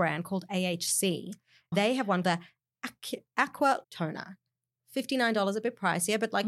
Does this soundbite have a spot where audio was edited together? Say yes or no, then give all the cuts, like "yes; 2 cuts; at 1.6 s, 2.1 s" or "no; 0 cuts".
yes; 3 cuts; at 1.7 s, 2.2 s, 3.8 s